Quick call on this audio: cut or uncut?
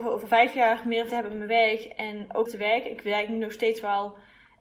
cut